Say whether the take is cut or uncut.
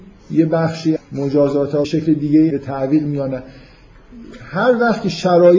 cut